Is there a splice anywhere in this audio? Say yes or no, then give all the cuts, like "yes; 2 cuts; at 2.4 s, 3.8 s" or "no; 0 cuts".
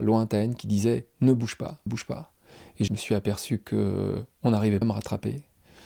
yes; 3 cuts; at 1.9 s, 2.9 s, 4.8 s